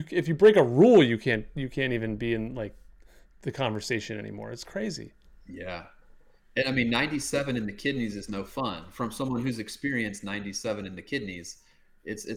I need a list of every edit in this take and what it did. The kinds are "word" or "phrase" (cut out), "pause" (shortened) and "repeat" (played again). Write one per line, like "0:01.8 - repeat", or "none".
none